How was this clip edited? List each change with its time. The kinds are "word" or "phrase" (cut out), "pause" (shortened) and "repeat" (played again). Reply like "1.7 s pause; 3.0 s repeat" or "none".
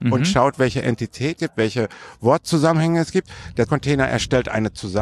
1.4 s word; 3.7 s word